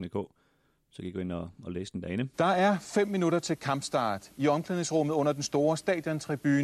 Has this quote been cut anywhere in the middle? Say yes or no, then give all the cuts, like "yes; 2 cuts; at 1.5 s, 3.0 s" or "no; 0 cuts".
yes; 1 cut; at 2.3 s